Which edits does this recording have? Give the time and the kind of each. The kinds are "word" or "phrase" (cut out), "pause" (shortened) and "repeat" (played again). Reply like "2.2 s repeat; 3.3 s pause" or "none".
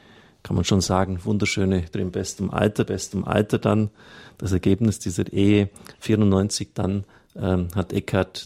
1.9 s word; 2.9 s repeat